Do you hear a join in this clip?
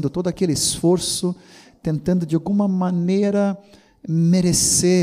no; 0 cuts

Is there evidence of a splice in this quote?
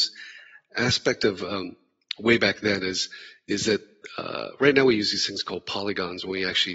no; 0 cuts

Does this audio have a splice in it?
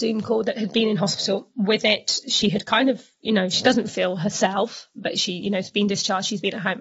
no; 0 cuts

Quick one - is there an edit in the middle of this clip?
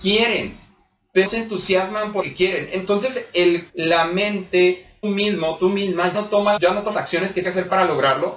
yes; 8 cuts; at 1.3 s, 2.2 s, 3.7 s, 5.0 s, 6.1 s, 6.6 s, 6.9 s, 7.4 s

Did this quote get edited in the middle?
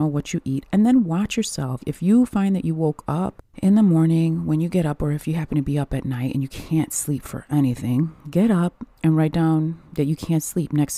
yes; 3 cuts; at 3.5 s, 8.2 s, 9.9 s

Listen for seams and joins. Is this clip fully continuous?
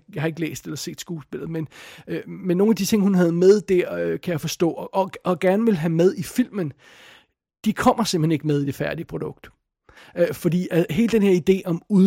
yes; 0 cuts

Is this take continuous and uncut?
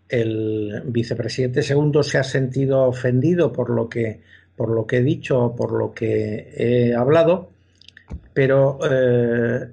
yes; 0 cuts

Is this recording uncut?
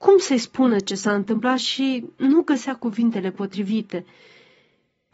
yes; 0 cuts

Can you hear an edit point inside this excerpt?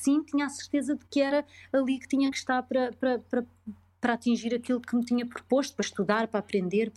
no; 0 cuts

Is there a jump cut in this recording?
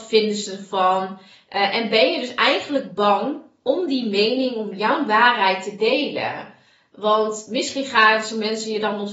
no; 0 cuts

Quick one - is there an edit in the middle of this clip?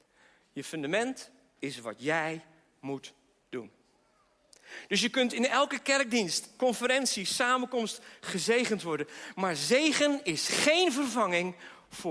no; 0 cuts

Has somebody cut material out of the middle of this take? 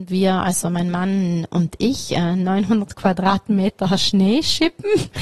no; 0 cuts

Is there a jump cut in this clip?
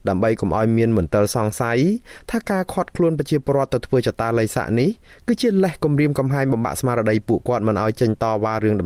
no; 0 cuts

